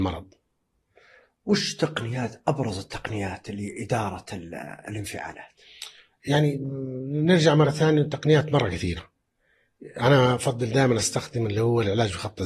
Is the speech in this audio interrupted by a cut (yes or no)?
no